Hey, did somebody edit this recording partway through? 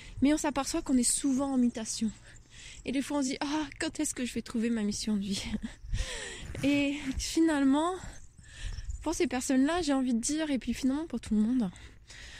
no; 0 cuts

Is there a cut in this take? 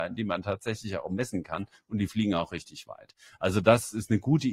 no; 0 cuts

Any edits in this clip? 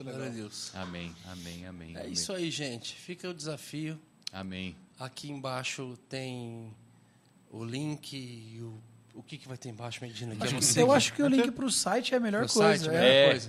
no; 0 cuts

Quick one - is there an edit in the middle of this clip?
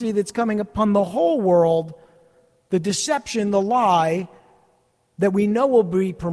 no; 0 cuts

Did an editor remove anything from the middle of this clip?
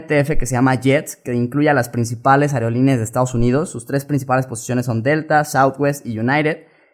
no; 0 cuts

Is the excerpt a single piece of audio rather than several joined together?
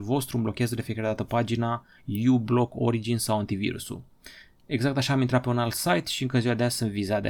yes; 0 cuts

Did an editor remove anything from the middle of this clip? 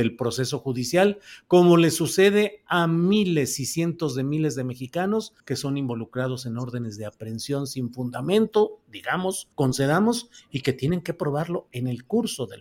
yes; 2 cuts; at 5.4 s, 9.5 s

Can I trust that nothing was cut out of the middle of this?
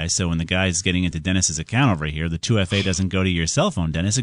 yes; 0 cuts

